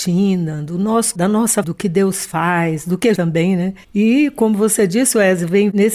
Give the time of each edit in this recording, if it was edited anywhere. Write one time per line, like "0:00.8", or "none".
0:01.2
0:01.6
0:03.2